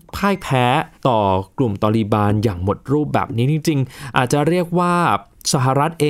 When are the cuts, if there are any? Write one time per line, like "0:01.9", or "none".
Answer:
0:01.0

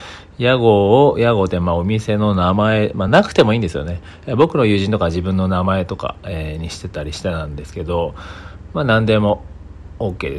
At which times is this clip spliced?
none

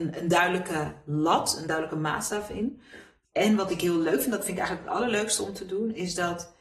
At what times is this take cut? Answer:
none

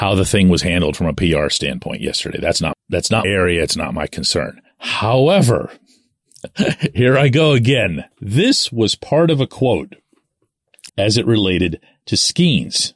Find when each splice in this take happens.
0:02.7
0:03.2
0:04.7
0:08.1
0:10.9

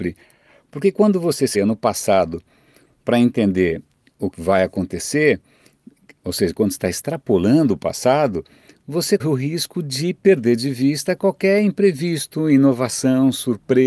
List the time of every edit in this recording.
0:01.5
0:04.3
0:09.2

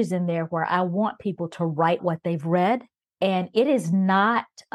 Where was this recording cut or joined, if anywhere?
0:02.0
0:03.0

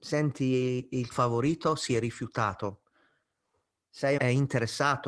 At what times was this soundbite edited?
0:01.1
0:04.2

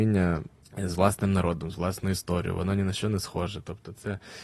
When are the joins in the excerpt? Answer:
none

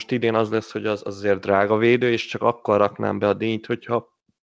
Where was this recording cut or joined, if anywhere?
none

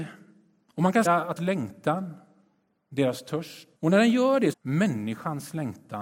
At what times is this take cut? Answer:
0:01.1
0:01.4
0:03.8
0:04.5

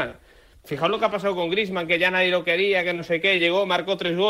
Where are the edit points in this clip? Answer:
none

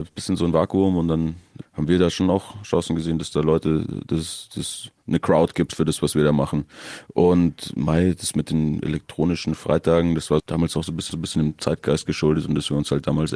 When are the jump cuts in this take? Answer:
0:01.6
0:10.4
0:11.1

